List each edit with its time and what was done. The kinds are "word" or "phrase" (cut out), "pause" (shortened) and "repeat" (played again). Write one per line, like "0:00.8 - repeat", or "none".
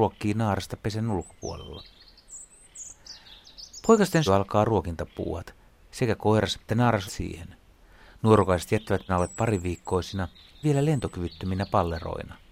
0:04.3 - word
0:06.7 - word
0:07.1 - word
0:09.1 - word
0:10.6 - word